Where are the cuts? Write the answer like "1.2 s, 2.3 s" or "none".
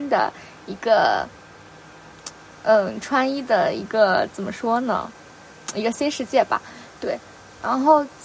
none